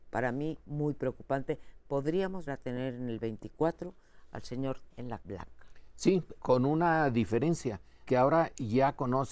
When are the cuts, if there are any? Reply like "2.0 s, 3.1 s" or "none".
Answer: 2.5 s, 4.9 s, 5.2 s, 6.4 s, 8.1 s

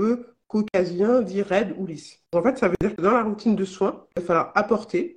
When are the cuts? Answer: 2.3 s, 4.1 s

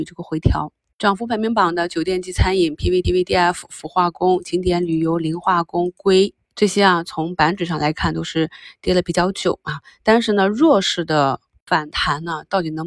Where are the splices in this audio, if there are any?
3.0 s, 6.4 s

